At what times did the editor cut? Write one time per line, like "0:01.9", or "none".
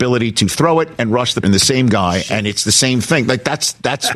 0:01.4